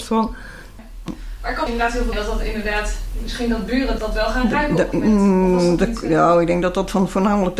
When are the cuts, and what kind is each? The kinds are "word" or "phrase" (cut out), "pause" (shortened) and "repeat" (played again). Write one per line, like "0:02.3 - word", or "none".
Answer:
0:01.7 - phrase
0:02.1 - phrase
0:04.0 - word
0:04.9 - word